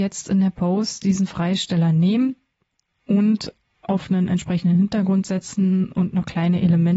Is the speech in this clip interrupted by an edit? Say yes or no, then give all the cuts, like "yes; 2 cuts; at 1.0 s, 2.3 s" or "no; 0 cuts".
no; 0 cuts